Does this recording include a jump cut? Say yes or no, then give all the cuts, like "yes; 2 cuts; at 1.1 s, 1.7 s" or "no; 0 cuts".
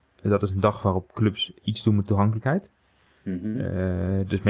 yes; 1 cut; at 1.1 s